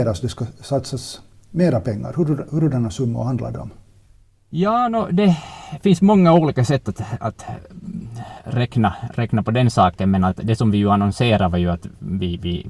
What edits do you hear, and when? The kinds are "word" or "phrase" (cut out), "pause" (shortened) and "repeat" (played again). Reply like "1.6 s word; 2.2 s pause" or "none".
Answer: none